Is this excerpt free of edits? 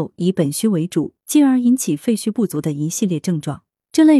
no; 1 cut; at 1.2 s

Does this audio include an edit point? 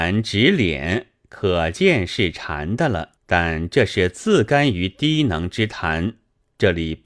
yes; 1 cut; at 3.2 s

